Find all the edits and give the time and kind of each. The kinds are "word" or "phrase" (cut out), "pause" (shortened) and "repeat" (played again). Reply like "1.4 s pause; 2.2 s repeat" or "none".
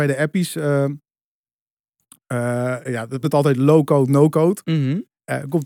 3.2 s word